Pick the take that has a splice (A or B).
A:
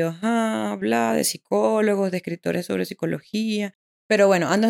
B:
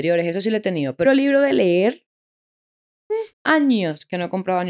B